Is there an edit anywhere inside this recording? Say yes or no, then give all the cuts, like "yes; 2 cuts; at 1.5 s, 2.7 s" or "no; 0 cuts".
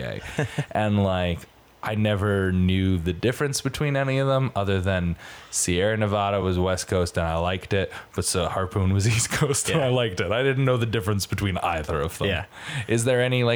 no; 0 cuts